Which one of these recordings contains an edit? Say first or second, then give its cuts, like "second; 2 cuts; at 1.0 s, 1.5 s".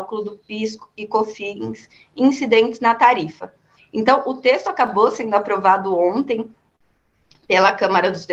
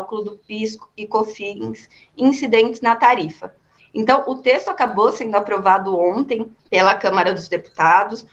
second; 1 cut; at 6.6 s